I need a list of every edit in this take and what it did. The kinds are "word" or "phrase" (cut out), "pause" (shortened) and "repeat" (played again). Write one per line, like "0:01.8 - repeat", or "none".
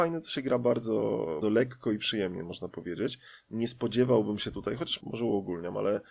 0:01.4 - word
0:05.0 - word